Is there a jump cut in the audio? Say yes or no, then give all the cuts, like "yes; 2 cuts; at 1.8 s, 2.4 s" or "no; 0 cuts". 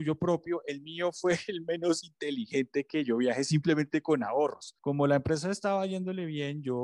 yes; 1 cut; at 4.8 s